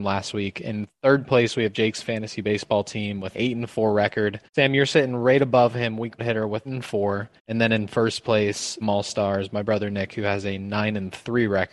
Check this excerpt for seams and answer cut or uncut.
cut